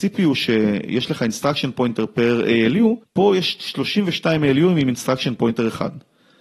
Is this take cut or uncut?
cut